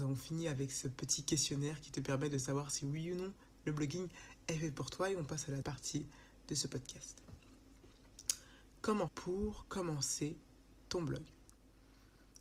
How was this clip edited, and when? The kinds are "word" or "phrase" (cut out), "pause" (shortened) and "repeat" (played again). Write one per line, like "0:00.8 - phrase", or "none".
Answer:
0:05.6 - word
0:09.1 - phrase

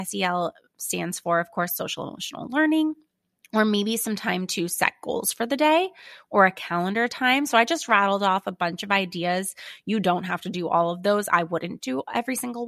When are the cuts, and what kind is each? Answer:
none

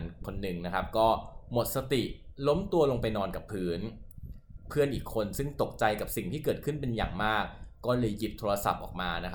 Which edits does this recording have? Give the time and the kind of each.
none

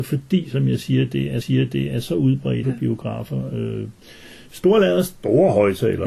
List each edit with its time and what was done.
0:01.4 - repeat
0:02.6 - word

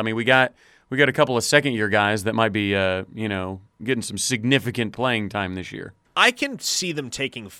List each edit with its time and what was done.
0:06.0 - pause

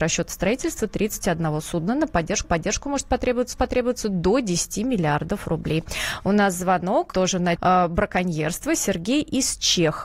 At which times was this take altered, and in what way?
0:02.4 - repeat
0:03.5 - repeat
0:07.1 - word
0:07.6 - word

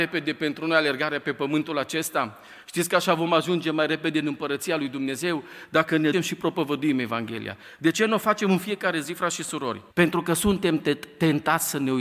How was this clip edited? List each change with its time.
0:06.1 - word
0:09.9 - pause

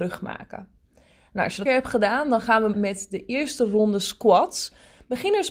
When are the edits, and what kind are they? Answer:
0:01.7 - phrase
0:02.7 - word

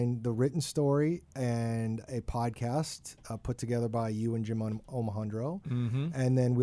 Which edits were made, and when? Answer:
none

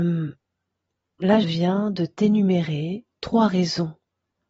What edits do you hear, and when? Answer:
0:01.4 - word

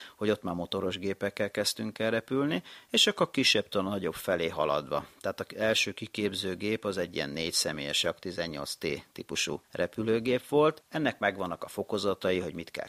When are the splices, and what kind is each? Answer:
none

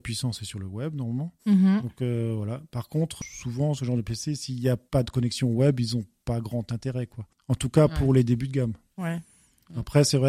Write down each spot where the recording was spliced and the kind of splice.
0:01.4 - pause
0:04.9 - pause

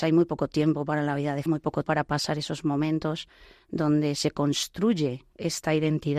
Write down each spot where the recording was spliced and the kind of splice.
0:01.5 - word
0:01.8 - word

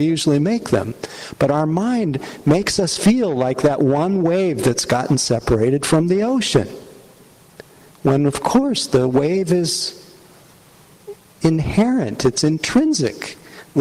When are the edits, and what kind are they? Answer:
none

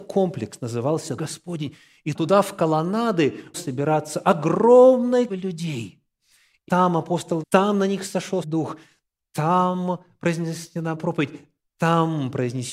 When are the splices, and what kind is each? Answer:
0:01.2 - word
0:02.1 - word
0:03.5 - word
0:05.3 - word
0:06.7 - word
0:07.4 - word
0:08.4 - word
0:11.0 - word

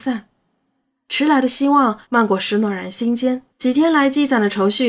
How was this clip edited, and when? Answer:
0:02.0 - pause
0:03.5 - pause

